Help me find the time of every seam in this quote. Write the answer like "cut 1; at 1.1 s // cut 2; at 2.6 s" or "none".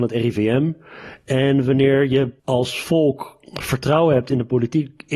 cut 1; at 2.4 s